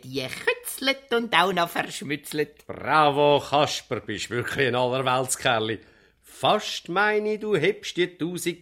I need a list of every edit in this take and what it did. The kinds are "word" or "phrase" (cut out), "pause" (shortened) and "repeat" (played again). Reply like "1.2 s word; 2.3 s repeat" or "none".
none